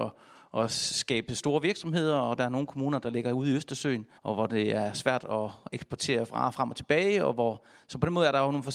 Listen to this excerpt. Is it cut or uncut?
cut